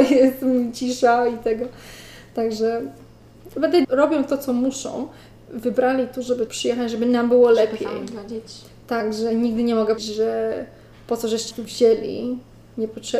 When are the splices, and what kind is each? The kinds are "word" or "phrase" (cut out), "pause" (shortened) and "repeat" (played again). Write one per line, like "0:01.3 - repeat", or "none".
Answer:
0:03.8 - word
0:06.5 - word
0:10.0 - word
0:11.5 - word